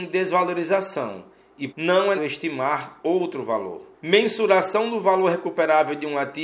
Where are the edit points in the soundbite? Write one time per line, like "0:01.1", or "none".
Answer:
0:01.7
0:02.2
0:03.9